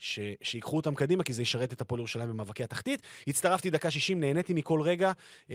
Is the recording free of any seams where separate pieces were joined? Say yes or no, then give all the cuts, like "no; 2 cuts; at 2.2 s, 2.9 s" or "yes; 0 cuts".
yes; 0 cuts